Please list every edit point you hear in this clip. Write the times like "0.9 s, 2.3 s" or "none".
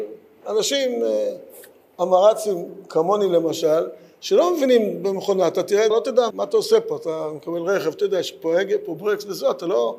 5.9 s, 6.3 s